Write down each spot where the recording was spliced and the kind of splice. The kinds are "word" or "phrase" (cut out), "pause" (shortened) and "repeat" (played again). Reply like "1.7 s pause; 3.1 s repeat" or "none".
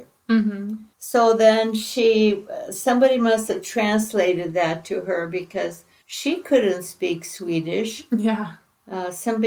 0.9 s pause; 6.0 s pause

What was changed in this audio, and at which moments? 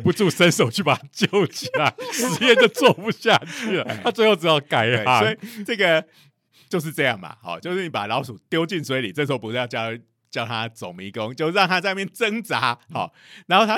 none

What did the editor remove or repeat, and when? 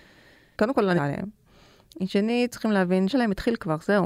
1.0 s phrase; 2.5 s word; 3.1 s word

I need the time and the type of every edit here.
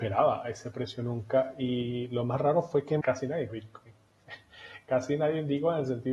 3.0 s word; 3.5 s word

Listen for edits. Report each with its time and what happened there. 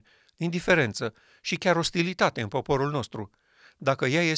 none

